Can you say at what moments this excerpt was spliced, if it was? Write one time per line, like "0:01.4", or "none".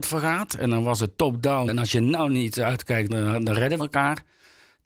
0:01.7
0:03.1
0:03.8